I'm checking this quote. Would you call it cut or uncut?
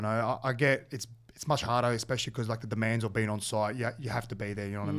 uncut